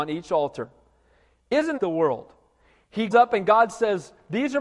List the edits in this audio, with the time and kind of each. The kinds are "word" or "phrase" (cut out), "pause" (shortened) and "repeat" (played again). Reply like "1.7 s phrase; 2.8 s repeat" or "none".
1.8 s phrase; 3.1 s word